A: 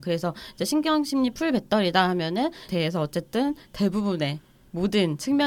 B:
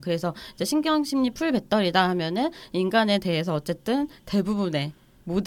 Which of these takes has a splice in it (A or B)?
A